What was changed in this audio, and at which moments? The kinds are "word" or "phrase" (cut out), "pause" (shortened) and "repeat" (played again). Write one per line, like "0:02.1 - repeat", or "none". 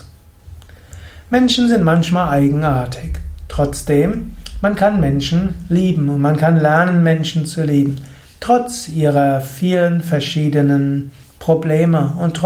none